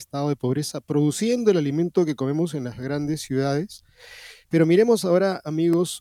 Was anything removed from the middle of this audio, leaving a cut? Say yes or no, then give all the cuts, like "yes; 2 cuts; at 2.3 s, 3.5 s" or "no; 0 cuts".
no; 0 cuts